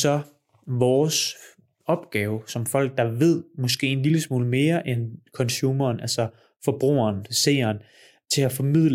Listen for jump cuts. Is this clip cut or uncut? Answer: uncut